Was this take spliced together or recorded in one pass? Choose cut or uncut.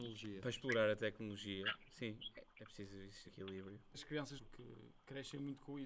cut